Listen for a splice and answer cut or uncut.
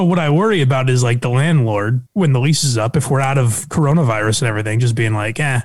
cut